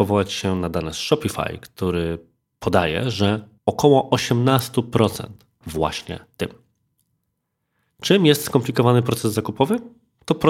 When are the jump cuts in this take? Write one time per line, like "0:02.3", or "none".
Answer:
0:03.6
0:05.6